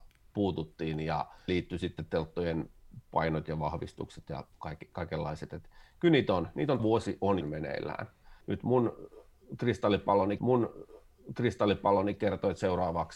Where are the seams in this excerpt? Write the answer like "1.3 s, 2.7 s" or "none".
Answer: 1.5 s, 4.5 s, 6.8 s, 7.4 s, 8.4 s, 10.4 s